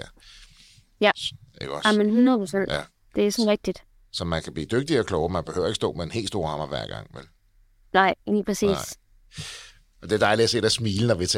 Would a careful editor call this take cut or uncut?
uncut